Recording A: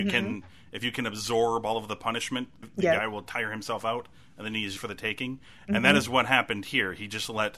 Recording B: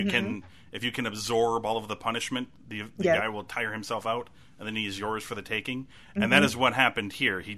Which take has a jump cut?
A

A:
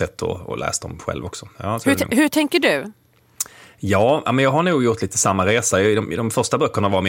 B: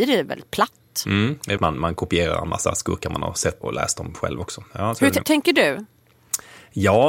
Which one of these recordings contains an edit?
B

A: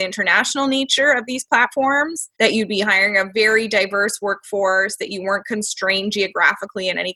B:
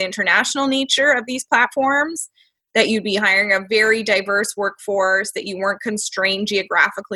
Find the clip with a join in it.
A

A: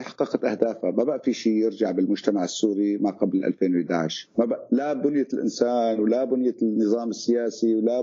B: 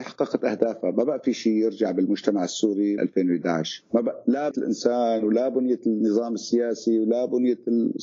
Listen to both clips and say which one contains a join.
B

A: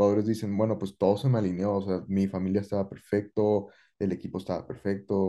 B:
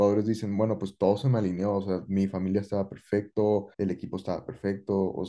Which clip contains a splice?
B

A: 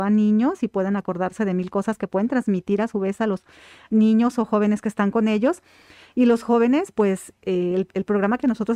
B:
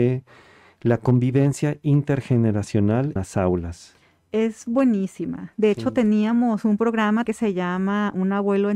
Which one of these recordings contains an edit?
B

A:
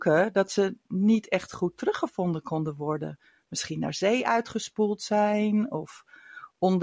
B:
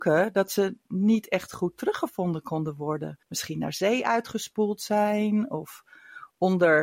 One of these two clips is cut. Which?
B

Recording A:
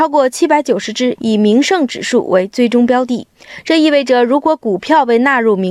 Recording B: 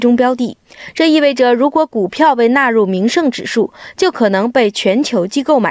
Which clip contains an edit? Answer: A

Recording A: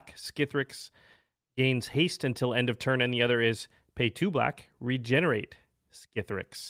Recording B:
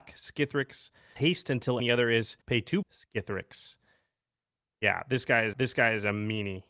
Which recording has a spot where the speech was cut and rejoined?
B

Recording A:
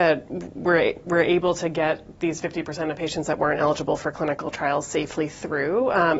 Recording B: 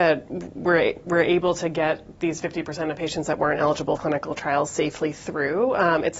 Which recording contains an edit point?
B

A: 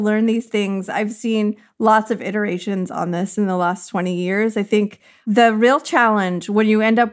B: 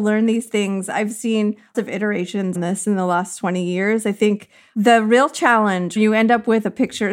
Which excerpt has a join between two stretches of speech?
B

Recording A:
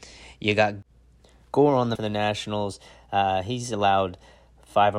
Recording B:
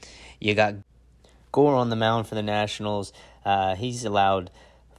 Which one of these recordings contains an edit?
A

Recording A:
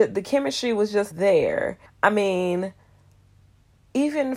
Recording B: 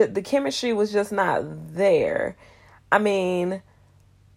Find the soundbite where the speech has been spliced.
A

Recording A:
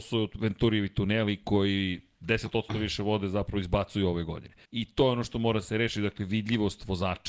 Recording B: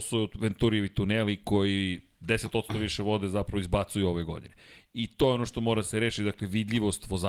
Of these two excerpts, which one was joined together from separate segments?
A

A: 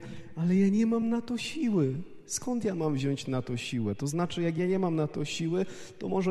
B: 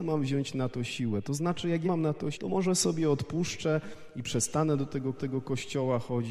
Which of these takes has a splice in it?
B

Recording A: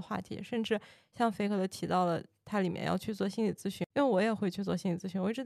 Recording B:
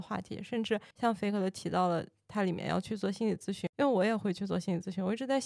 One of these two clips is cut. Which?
B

